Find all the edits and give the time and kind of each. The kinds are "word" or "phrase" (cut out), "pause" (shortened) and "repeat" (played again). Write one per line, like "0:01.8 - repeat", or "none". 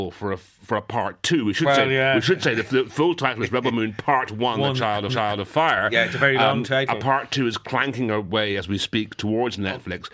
0:05.1 - repeat